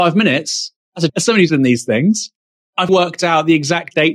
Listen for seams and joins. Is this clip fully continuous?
no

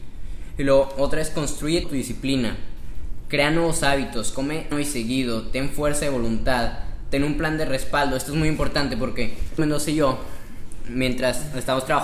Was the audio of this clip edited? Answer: yes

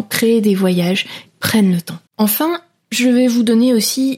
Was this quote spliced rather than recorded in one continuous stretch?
yes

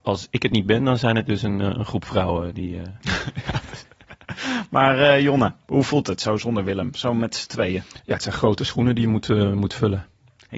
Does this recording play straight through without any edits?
yes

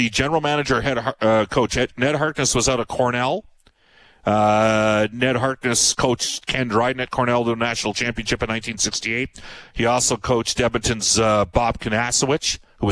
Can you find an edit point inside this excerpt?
no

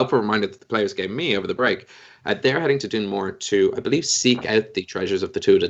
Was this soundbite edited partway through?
no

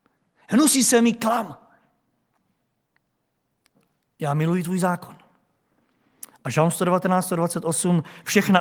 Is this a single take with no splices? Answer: yes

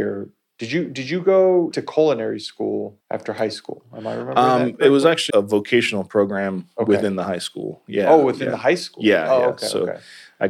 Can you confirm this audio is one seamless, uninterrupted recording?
no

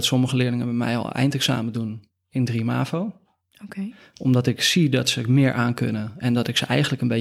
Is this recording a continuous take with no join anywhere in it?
yes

